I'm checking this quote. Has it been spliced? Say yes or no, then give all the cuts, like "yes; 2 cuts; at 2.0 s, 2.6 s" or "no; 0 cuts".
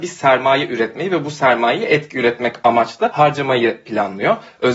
no; 0 cuts